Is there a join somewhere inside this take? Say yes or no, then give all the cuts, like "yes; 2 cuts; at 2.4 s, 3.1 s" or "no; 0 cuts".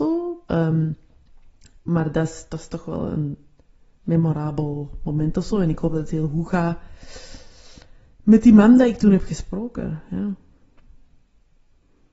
no; 0 cuts